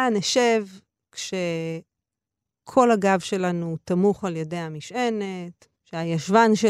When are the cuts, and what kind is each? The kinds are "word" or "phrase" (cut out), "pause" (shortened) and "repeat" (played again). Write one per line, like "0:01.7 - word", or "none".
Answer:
0:05.7 - pause